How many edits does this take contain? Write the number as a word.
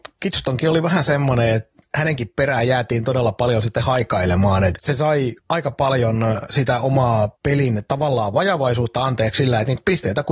two